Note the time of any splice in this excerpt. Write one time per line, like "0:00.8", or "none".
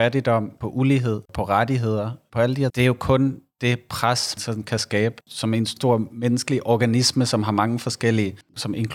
0:01.3
0:02.7
0:04.4
0:05.2